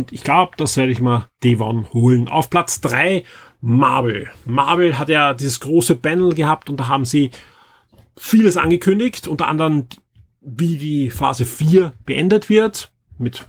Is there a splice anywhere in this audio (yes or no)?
no